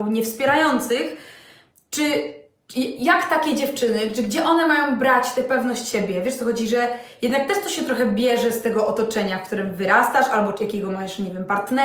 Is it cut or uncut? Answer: uncut